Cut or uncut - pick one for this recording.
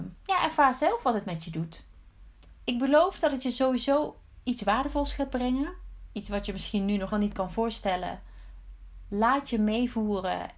cut